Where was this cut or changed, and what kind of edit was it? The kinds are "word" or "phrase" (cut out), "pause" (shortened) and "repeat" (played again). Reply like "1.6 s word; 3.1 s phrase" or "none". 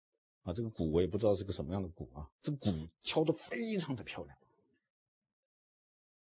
2.3 s pause; 2.9 s pause